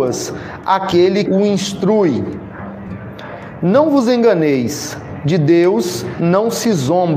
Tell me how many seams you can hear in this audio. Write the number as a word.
one